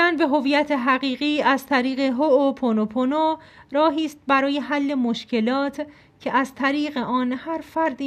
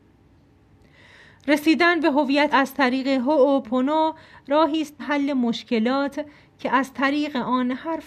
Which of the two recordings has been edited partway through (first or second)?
second